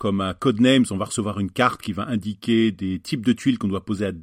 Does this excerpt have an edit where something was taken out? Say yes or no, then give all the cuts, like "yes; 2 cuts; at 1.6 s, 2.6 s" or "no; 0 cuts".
no; 0 cuts